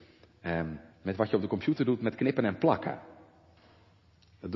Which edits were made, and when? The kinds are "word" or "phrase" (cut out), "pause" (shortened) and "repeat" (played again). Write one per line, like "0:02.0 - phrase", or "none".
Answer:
0:00.9 - pause